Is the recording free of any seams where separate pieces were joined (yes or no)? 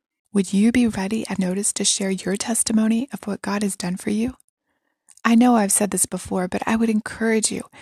no